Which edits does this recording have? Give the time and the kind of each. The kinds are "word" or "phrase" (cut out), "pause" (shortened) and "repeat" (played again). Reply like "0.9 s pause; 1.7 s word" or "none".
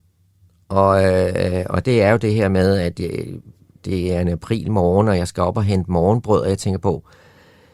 none